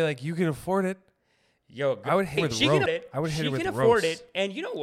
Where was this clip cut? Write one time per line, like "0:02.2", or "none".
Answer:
0:02.4
0:02.9

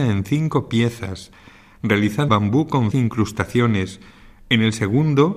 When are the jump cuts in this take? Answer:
0:02.3
0:02.9

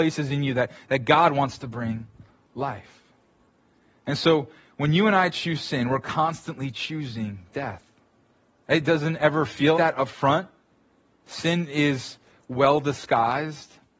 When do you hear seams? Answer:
0:09.7

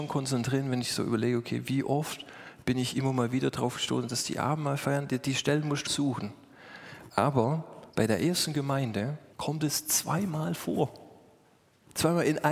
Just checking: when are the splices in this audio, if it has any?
0:05.9
0:07.9
0:09.3

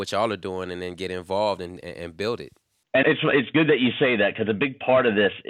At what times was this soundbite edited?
0:01.8
0:03.0

